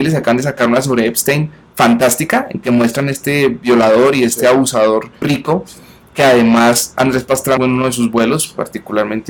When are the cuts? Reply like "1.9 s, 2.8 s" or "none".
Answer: 5.2 s, 7.6 s